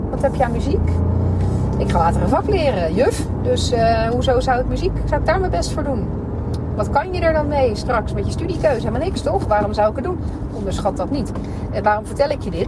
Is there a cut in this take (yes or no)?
no